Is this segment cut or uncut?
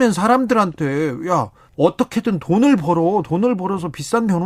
cut